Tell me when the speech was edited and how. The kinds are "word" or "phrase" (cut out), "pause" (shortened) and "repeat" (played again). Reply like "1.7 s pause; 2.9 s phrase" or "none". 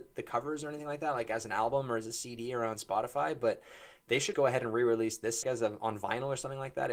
4.3 s word; 5.4 s word